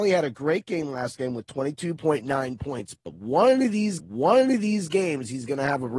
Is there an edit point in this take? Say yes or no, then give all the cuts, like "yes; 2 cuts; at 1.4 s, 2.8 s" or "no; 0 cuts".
yes; 1 cut; at 4.0 s